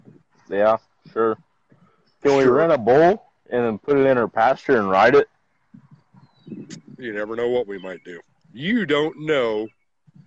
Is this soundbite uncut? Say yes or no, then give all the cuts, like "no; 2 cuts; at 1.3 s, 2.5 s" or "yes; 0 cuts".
no; 1 cut; at 8.3 s